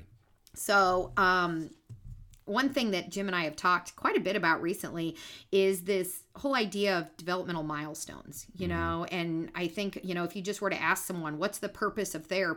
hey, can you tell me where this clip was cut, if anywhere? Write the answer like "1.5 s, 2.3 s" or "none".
9.1 s